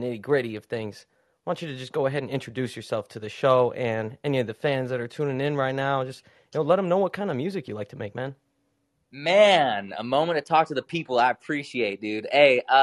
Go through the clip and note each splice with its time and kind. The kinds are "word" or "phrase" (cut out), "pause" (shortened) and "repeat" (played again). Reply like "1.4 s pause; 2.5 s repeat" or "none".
none